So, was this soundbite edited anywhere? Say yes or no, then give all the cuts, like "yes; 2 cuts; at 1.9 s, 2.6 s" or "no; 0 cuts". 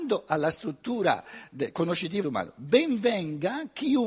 yes; 1 cut; at 2.2 s